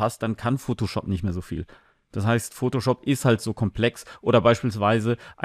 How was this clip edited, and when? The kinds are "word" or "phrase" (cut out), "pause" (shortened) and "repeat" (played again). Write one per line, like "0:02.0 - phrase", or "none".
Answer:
none